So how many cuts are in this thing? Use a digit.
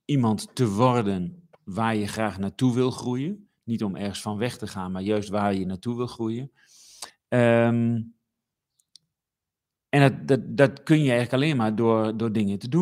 2